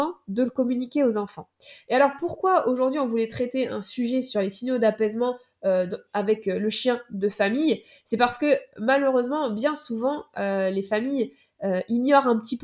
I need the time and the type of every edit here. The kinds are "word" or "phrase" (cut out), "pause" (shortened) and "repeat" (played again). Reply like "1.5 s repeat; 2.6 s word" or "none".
none